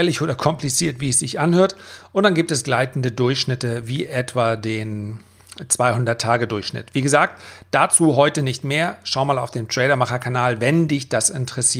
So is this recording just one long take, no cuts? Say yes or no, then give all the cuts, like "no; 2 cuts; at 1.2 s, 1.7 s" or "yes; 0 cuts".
yes; 0 cuts